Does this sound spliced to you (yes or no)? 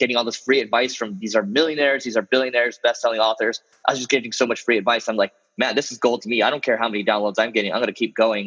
no